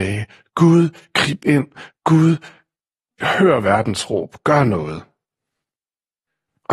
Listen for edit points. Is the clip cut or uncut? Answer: uncut